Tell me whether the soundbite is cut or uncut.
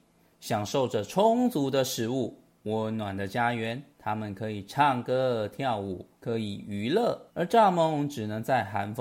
cut